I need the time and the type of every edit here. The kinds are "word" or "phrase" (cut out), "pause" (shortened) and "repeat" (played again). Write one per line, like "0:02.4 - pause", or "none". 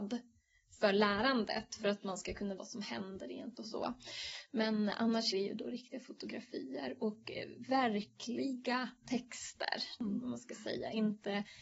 0:02.6 - word
0:03.5 - word
0:05.3 - word